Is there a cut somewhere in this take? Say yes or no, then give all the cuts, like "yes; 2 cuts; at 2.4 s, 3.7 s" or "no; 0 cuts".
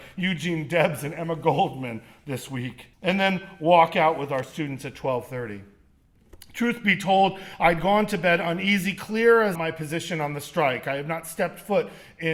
yes; 2 cuts; at 2.9 s, 9.5 s